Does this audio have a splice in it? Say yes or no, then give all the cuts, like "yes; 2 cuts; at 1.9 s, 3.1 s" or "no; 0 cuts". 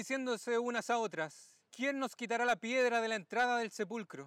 yes; 1 cut; at 1.7 s